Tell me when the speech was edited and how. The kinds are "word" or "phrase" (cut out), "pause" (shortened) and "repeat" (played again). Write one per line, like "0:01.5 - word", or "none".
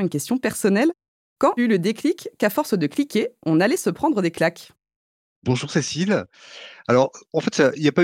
0:01.6 - word